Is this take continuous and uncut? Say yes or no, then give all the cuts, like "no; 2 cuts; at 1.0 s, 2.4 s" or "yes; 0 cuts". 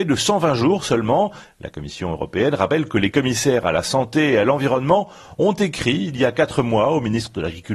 yes; 0 cuts